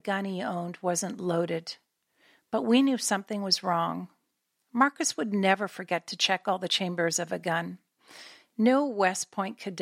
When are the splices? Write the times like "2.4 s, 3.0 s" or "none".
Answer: none

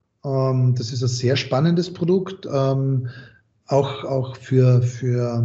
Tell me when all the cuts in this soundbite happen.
none

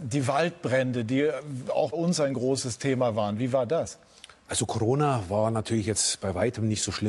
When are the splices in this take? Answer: 1.9 s, 4.4 s

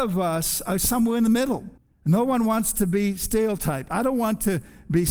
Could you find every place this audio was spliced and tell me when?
1.8 s

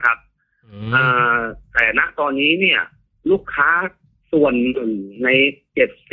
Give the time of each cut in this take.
none

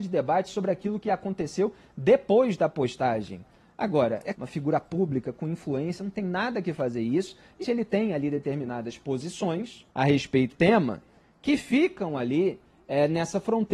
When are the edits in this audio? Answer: 4.3 s, 7.6 s, 9.9 s, 10.5 s

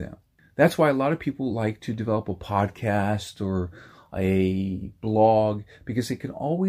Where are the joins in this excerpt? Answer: none

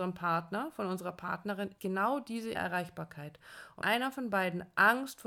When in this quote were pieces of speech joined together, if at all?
1.8 s, 2.5 s, 3.8 s

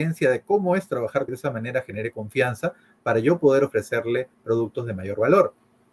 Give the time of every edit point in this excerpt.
1.3 s

